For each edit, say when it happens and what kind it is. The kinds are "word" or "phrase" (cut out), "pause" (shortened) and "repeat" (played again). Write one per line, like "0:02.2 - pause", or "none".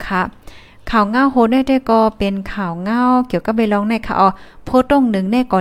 none